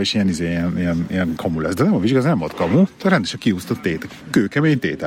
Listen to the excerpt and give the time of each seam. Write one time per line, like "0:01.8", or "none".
none